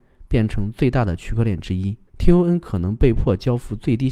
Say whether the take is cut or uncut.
cut